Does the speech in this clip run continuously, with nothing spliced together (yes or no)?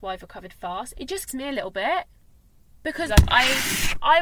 no